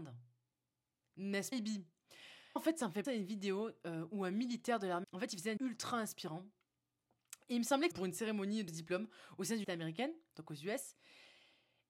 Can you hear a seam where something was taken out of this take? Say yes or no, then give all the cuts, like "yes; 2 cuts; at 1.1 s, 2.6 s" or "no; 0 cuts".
yes; 8 cuts; at 1.5 s, 2.6 s, 3.0 s, 5.0 s, 5.6 s, 7.9 s, 8.7 s, 9.6 s